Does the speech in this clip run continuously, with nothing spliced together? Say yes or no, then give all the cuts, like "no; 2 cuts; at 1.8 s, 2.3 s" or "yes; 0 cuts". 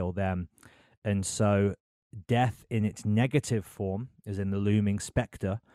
yes; 0 cuts